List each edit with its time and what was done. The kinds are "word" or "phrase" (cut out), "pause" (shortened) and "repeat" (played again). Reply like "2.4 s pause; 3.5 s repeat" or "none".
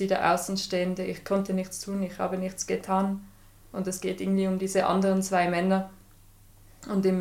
none